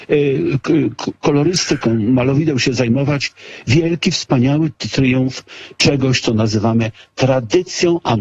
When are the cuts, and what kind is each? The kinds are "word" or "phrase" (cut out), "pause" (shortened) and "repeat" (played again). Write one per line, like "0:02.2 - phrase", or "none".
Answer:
none